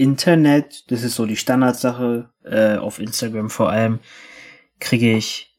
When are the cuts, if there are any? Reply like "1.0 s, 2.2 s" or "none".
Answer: none